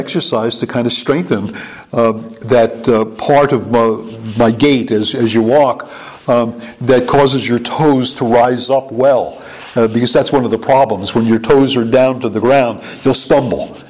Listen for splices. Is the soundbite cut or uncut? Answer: uncut